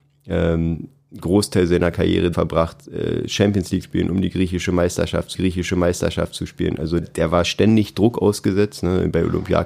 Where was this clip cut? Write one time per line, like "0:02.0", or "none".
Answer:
0:02.3
0:03.8
0:05.3
0:07.0